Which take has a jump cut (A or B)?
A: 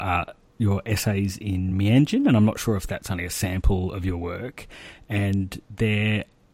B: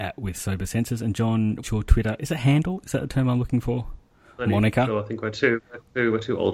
B